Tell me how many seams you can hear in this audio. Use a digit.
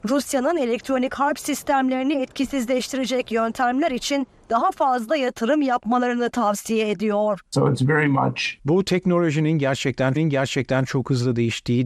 2